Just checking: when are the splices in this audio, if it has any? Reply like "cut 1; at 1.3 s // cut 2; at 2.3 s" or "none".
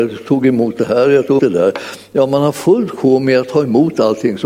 cut 1; at 1.4 s